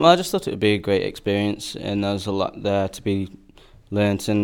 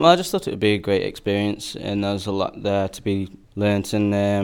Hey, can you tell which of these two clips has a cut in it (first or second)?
second